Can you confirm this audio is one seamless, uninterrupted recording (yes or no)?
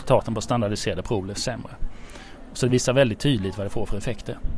yes